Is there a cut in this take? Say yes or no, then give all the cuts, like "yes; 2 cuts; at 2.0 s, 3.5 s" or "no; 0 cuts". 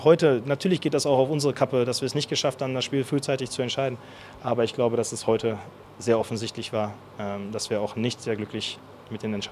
no; 0 cuts